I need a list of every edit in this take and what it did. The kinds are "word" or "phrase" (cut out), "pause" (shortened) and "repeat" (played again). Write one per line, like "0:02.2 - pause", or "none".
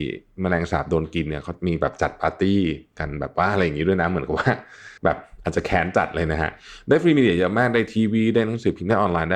0:05.0 - pause